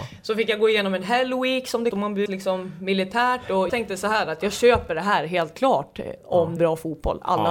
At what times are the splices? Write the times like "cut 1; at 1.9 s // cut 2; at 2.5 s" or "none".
cut 1; at 1.9 s // cut 2; at 2.3 s // cut 3; at 3.7 s // cut 4; at 6.6 s